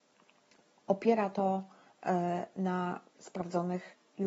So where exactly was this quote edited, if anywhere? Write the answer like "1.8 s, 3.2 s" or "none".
3.2 s